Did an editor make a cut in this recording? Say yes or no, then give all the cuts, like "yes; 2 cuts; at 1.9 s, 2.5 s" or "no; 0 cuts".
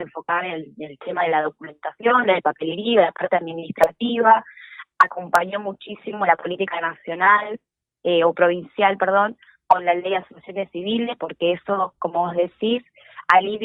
no; 0 cuts